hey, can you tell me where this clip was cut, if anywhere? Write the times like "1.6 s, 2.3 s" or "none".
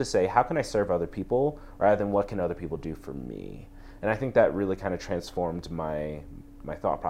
none